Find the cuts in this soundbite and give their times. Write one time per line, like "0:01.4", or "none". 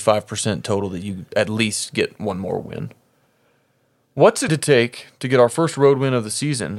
0:04.5